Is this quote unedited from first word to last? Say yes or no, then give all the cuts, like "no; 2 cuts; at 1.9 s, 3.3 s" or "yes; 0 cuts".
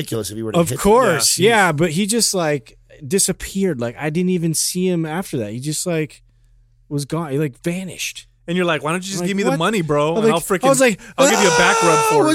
no; 1 cut; at 7.6 s